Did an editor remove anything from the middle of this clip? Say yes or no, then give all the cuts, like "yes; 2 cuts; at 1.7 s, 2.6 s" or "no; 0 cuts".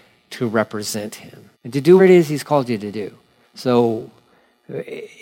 yes; 3 cuts; at 1.5 s, 2.0 s, 3.4 s